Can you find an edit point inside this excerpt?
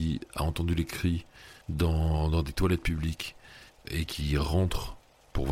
yes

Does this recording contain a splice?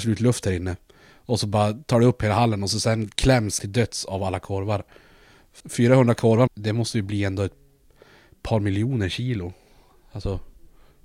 yes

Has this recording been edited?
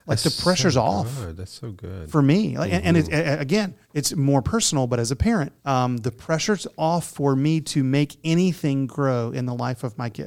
yes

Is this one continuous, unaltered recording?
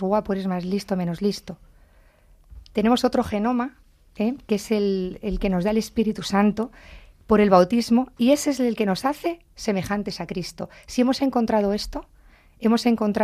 yes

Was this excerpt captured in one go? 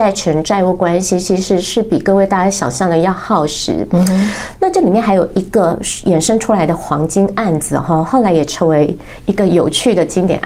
yes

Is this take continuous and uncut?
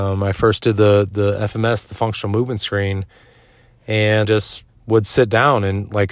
no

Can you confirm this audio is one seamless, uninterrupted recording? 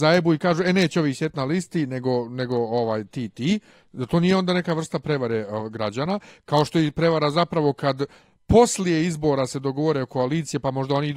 yes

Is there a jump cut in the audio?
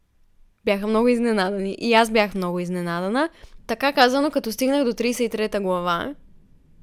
no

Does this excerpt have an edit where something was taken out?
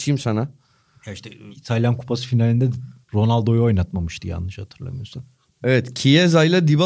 yes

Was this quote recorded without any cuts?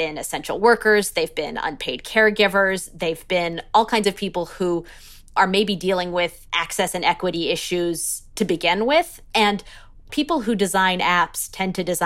no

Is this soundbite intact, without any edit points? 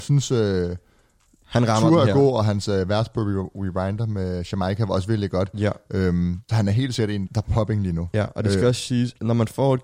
no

